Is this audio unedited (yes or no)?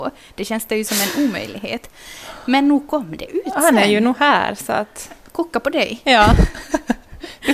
yes